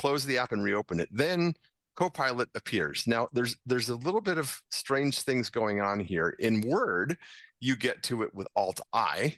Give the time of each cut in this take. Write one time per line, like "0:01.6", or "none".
none